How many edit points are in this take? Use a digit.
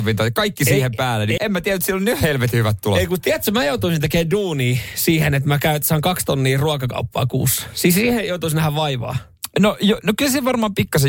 1